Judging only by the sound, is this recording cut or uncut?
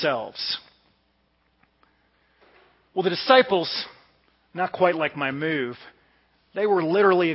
uncut